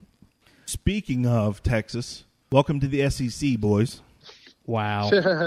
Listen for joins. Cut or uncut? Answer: uncut